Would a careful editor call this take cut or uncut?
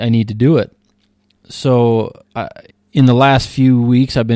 cut